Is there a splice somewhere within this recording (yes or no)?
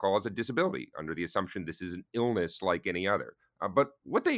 yes